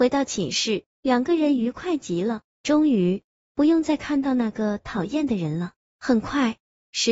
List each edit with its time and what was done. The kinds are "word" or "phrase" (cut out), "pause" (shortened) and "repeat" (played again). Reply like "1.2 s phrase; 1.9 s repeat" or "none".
0.9 s pause

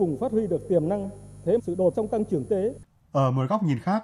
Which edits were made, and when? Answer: 1.6 s phrase; 1.9 s word; 2.5 s word

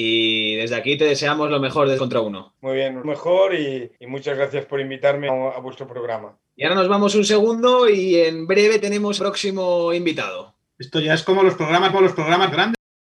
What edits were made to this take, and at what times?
2.0 s word; 2.6 s pause; 3.0 s phrase; 4.0 s pause; 5.3 s word; 6.5 s pause; 9.2 s phrase; 11.9 s repeat

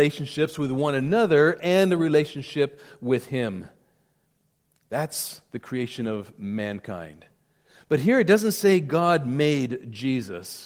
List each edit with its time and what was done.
none

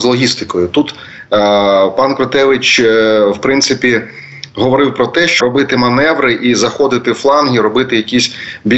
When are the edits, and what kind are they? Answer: 5.4 s word

